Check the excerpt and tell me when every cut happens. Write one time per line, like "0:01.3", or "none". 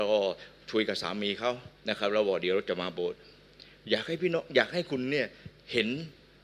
0:01.8